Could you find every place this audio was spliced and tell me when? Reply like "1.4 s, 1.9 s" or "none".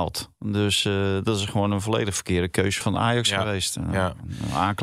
2.8 s